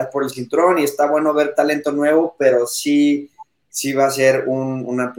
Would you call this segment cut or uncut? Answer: uncut